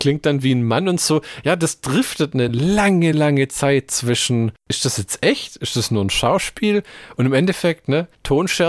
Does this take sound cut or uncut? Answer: uncut